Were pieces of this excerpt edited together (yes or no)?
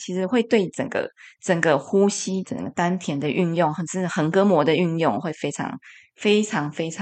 no